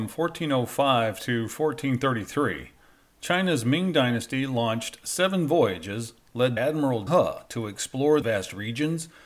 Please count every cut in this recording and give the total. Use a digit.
3